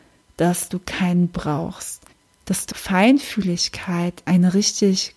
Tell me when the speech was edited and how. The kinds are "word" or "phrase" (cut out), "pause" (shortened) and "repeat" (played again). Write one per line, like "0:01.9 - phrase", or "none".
0:02.1 - pause
0:02.7 - phrase
0:04.2 - word